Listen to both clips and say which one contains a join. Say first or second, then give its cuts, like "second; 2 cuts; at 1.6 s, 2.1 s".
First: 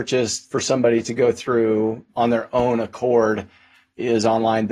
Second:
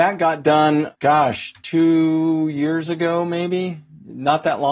second; 1 cut; at 0.9 s